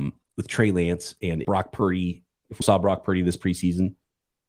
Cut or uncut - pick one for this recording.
cut